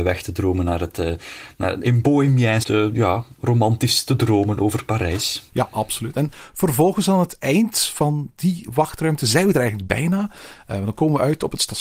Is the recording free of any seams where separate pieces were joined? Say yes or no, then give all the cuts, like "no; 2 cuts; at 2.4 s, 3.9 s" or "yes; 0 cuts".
no; 3 cuts; at 1.8 s, 2.6 s, 5.5 s